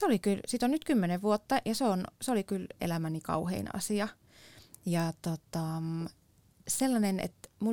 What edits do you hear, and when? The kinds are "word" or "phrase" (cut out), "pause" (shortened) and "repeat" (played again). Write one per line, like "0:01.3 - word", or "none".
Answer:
0:02.8 - word

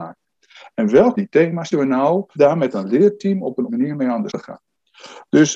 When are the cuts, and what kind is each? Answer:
0:01.2 - word
0:01.7 - word
0:02.4 - word
0:03.7 - word
0:04.3 - word

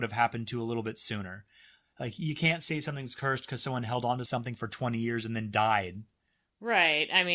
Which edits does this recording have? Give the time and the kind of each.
none

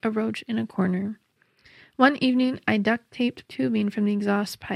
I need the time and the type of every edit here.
0:03.5 - word

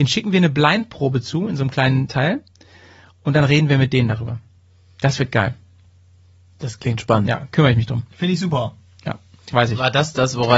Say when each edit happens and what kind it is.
0:08.1 - pause

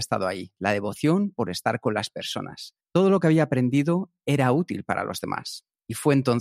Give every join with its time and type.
0:02.8 - pause

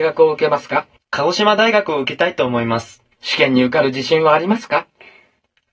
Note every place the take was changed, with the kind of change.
0:01.0 - pause
0:03.1 - pause

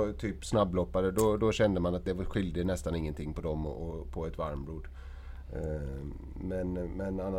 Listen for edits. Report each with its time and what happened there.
none

